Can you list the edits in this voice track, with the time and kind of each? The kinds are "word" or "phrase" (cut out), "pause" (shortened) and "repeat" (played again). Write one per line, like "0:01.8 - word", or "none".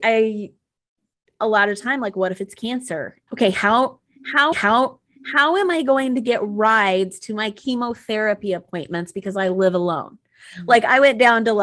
0:01.4 - phrase
0:03.3 - word
0:04.5 - repeat